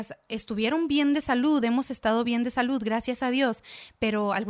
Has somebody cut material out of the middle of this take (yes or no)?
no